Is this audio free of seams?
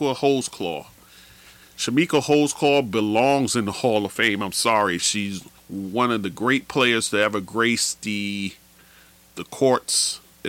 no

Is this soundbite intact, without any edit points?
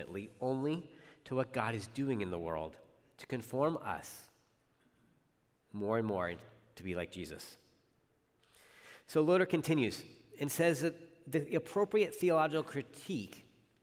yes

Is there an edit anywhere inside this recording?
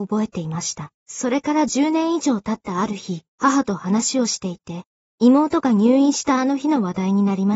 yes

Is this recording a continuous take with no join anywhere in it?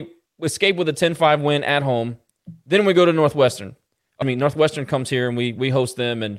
no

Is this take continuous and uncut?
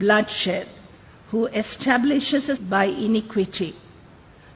no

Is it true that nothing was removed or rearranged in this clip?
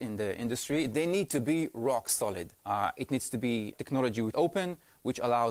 no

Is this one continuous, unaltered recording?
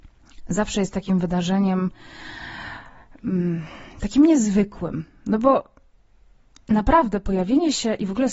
yes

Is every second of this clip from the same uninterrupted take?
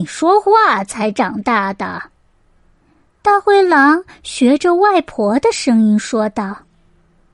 yes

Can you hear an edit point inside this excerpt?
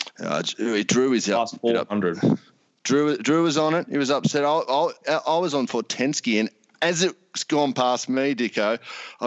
no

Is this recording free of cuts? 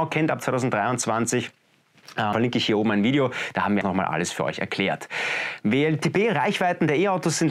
no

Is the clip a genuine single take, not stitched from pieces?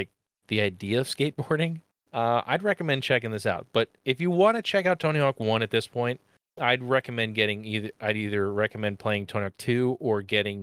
no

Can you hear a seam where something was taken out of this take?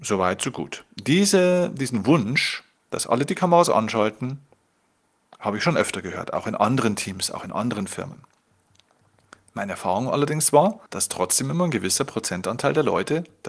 yes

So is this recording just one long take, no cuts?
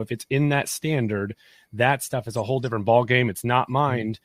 yes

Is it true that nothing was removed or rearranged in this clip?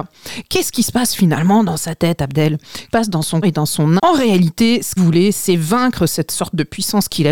no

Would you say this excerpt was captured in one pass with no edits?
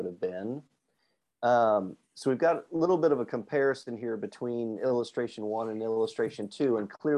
yes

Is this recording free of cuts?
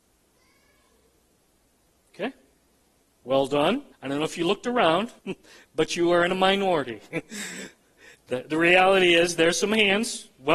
no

